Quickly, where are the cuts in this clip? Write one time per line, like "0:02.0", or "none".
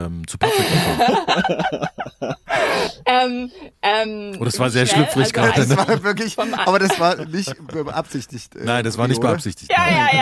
none